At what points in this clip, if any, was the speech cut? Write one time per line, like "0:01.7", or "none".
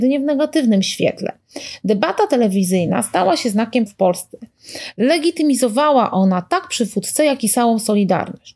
0:03.9